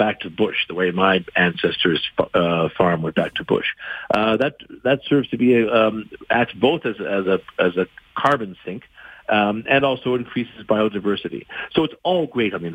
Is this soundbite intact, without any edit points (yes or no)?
yes